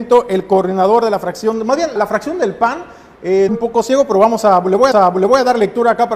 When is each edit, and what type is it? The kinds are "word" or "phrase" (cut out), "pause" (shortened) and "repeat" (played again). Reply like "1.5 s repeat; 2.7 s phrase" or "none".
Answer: 2.0 s word; 3.5 s phrase; 4.9 s repeat